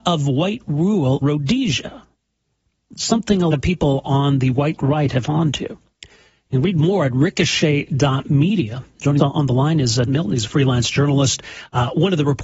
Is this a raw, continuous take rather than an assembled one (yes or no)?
no